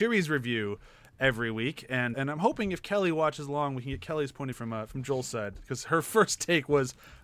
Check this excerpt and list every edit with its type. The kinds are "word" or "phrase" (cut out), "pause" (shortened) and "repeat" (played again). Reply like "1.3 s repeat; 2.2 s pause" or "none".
2.1 s word; 4.5 s phrase